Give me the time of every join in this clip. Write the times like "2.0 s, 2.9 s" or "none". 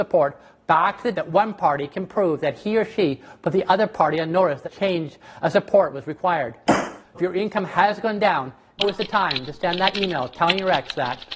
1.1 s, 4.6 s, 7.1 s, 8.8 s

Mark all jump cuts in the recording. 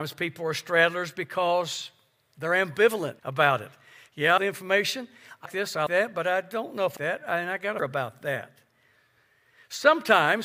3.2 s, 4.4 s, 5.5 s, 5.9 s, 7.0 s, 7.8 s

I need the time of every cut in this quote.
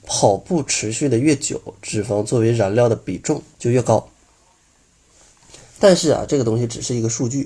3.5 s

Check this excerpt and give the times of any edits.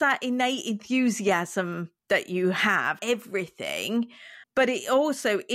2.0 s, 3.0 s, 4.4 s

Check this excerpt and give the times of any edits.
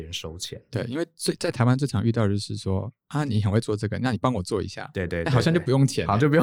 3.0 s

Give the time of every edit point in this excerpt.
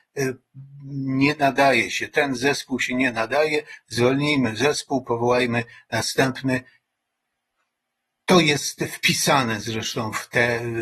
none

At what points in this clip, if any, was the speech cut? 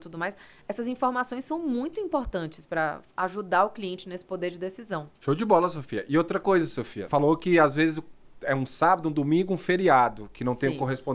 5.1 s, 7.1 s

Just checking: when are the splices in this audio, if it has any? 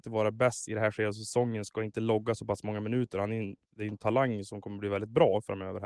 3.6 s

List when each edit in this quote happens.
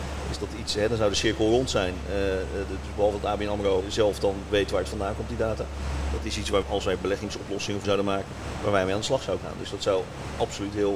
3.8 s, 6.6 s, 7.8 s, 9.4 s

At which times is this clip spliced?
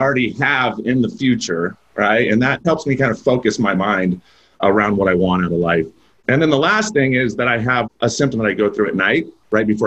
8.3 s

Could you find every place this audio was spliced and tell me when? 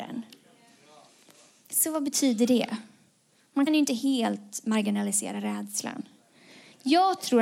3.7 s

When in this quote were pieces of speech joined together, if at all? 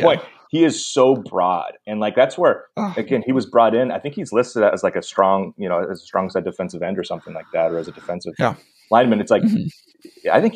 none

